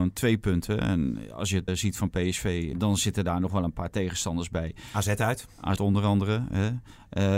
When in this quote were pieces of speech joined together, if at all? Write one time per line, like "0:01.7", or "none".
0:01.7
0:02.7
0:05.8